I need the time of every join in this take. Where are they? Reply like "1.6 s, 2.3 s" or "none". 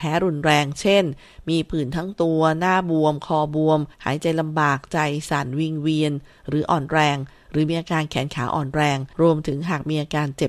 3.9 s, 9.1 s